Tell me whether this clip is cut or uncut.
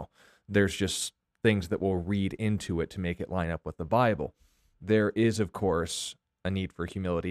uncut